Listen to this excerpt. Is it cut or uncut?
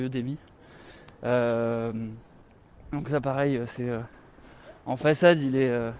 uncut